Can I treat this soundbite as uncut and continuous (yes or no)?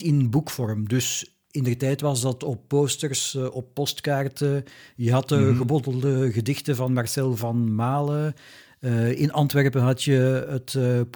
yes